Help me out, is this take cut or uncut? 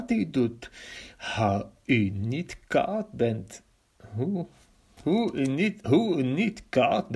uncut